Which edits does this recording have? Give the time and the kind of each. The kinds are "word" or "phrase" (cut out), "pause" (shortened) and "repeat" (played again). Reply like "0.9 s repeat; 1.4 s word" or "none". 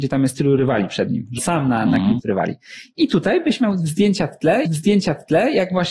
1.4 s word; 2.2 s word; 4.7 s repeat